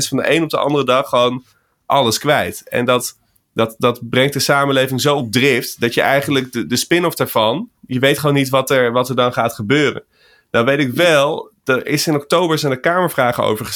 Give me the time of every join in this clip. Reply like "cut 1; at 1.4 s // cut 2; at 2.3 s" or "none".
cut 1; at 7.8 s // cut 2; at 11.6 s

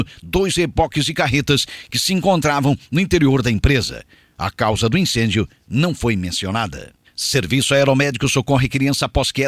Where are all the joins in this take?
none

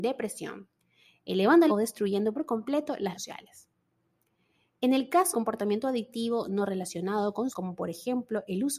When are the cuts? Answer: cut 1; at 1.7 s // cut 2; at 3.1 s // cut 3; at 5.3 s // cut 4; at 7.5 s

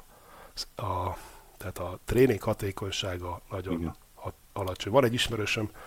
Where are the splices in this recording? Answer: cut 1; at 4.0 s

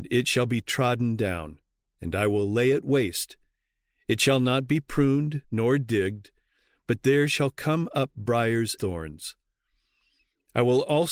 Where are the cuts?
cut 1; at 1.7 s // cut 2; at 5.4 s // cut 3; at 8.8 s

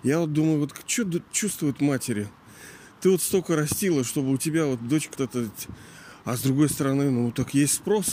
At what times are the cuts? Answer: cut 1; at 5.1 s

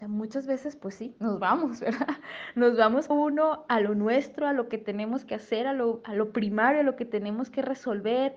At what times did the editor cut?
cut 1; at 3.1 s

